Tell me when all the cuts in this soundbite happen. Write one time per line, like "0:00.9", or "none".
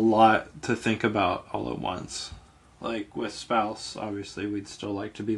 none